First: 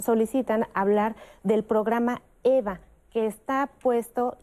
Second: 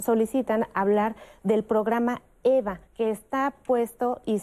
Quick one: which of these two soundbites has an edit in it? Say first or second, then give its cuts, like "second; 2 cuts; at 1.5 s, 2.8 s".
second; 1 cut; at 2.9 s